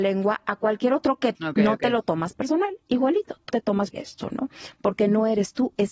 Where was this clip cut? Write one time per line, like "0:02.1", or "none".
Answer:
0:01.3
0:03.5
0:03.9